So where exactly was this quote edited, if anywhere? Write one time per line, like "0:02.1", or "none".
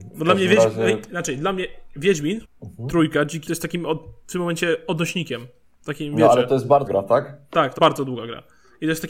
0:02.4
0:03.5
0:05.6
0:06.9
0:07.8